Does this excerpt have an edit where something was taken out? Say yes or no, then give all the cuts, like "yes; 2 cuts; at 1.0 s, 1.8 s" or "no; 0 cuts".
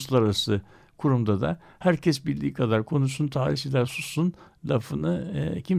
no; 0 cuts